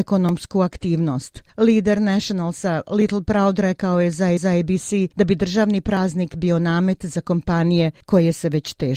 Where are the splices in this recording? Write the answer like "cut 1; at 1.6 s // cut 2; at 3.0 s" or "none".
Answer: cut 1; at 4.4 s